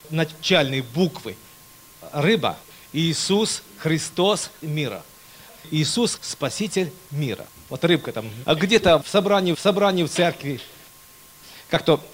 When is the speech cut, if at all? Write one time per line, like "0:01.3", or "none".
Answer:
0:02.7
0:04.6
0:06.2
0:07.6
0:08.4
0:09.0
0:09.5